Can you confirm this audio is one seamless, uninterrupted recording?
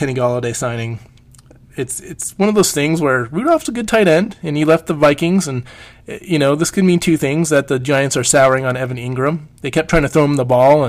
yes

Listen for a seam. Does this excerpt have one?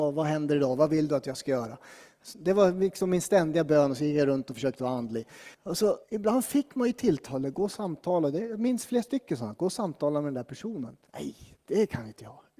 yes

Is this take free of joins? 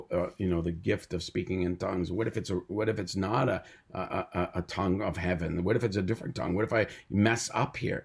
yes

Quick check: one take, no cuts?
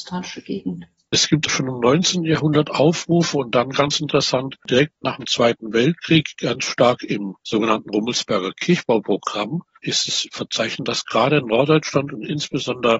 yes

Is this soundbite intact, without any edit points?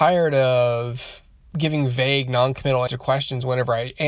no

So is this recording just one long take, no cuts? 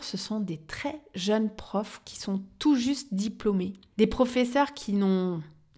yes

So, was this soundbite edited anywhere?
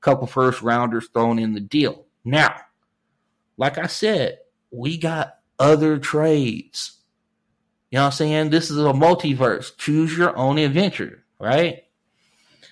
no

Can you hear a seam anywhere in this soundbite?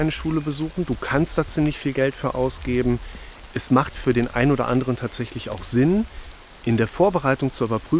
no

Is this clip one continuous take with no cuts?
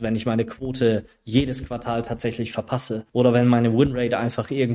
no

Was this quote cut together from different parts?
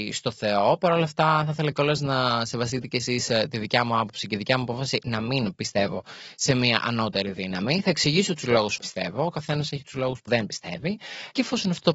yes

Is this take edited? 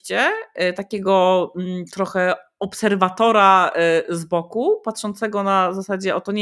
no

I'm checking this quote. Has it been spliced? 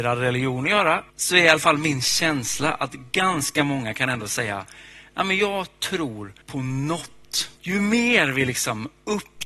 yes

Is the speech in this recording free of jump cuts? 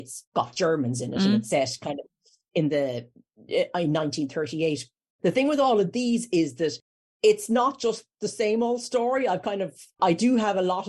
yes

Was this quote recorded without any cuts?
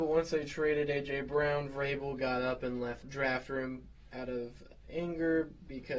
no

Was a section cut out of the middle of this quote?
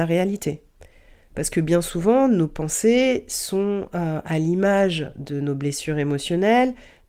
no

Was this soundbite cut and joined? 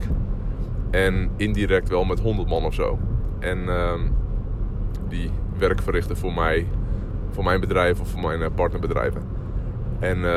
yes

